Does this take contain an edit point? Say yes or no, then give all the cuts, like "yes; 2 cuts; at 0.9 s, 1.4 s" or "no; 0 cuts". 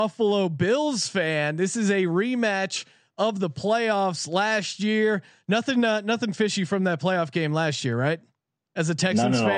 no; 0 cuts